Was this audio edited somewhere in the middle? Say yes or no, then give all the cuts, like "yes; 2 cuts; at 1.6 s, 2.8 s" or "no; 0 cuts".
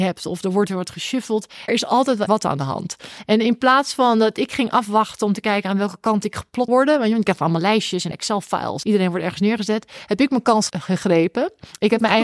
yes; 6 cuts; at 1.7 s, 2.3 s, 6.7 s, 8.1 s, 8.8 s, 10.7 s